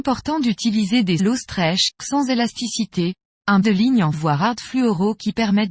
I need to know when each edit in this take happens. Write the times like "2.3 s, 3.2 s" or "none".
1.2 s, 2.0 s, 3.6 s, 4.1 s